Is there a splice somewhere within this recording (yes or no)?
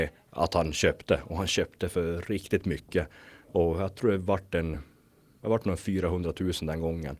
no